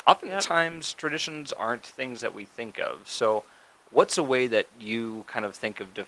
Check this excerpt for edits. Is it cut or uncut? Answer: uncut